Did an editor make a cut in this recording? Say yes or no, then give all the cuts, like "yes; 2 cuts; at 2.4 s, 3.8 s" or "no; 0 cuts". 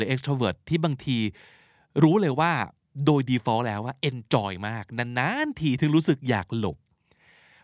no; 0 cuts